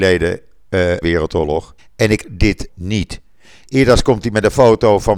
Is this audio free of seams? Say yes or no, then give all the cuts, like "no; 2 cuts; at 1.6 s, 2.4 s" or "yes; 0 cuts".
no; 4 cuts; at 1.0 s, 1.8 s, 2.2 s, 2.7 s